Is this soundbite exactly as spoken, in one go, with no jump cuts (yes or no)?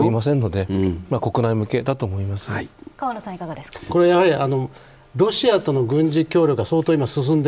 yes